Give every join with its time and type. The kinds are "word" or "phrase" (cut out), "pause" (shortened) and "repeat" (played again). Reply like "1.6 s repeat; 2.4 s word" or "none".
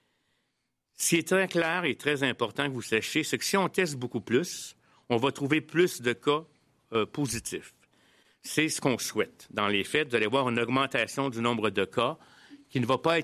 none